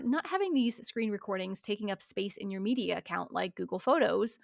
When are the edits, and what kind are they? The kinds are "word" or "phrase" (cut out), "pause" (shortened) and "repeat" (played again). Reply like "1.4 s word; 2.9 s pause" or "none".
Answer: none